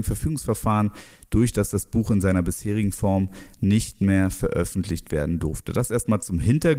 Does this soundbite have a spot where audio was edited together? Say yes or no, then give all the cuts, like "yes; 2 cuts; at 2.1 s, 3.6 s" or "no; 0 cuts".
no; 0 cuts